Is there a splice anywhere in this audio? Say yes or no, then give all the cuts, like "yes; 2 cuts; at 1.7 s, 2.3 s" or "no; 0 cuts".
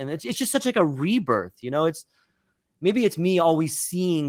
no; 0 cuts